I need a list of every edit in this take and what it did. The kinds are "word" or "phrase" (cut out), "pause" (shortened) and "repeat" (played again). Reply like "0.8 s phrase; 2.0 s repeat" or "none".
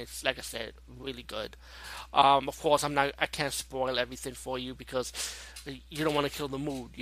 none